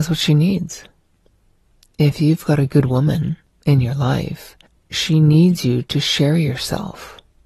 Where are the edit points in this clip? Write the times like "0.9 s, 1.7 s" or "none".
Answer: none